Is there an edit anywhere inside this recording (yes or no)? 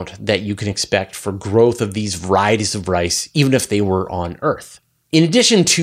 no